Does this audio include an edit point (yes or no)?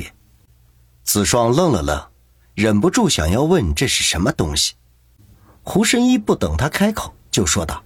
no